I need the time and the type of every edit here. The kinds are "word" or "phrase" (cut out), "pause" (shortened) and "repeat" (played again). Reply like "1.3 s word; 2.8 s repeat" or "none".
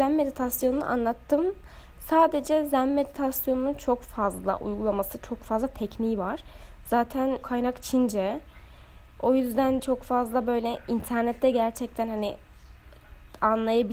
7.4 s phrase; 9.8 s word